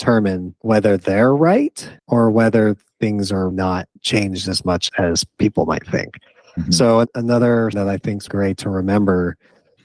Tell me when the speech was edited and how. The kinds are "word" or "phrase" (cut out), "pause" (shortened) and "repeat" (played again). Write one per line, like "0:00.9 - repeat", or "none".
0:02.0 - pause
0:03.5 - word
0:04.0 - pause
0:04.9 - word
0:07.7 - word
0:08.3 - word

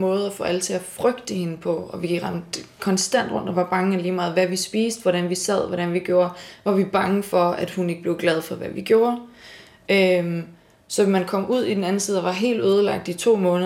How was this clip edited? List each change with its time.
none

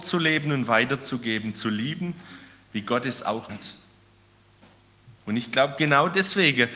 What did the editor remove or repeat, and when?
0:03.5 - word
0:05.2 - pause

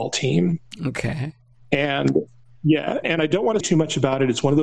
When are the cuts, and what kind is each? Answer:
0:03.0 - word
0:03.6 - word

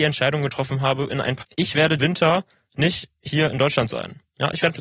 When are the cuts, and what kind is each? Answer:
0:01.1 - word
0:01.4 - word
0:02.0 - word

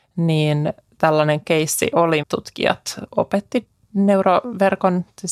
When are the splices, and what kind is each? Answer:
0:02.2 - word

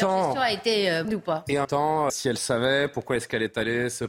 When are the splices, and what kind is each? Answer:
0:01.0 - word
0:01.6 - word
0:02.1 - word

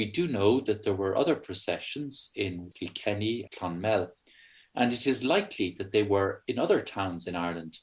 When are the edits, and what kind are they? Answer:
0:02.7 - word
0:03.5 - word

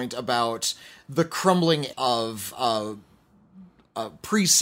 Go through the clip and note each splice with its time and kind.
0:01.9 - word

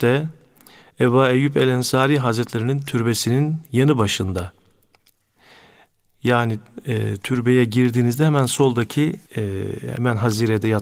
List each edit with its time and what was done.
0:09.3 - pause

